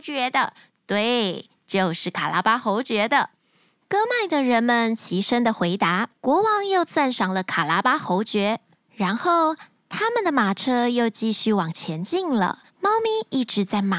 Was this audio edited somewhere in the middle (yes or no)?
yes